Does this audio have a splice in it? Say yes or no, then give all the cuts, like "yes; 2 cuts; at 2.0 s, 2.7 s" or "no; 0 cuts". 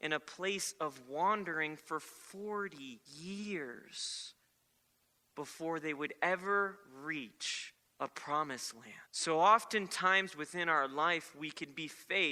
yes; 3 cuts; at 3.1 s, 7.8 s, 9.0 s